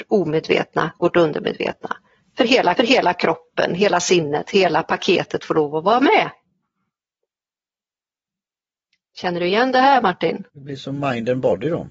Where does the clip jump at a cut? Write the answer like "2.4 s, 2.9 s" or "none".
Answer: 2.8 s, 10.5 s